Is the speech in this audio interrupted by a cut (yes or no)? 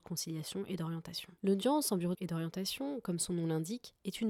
yes